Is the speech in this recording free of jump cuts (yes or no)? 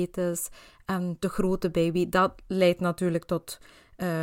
yes